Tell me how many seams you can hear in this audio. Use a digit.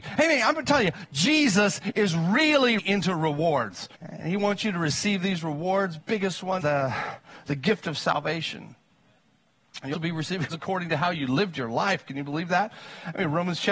6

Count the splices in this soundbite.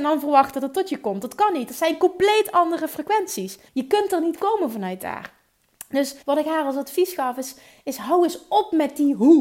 2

